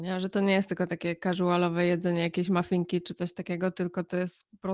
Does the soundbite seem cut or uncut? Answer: uncut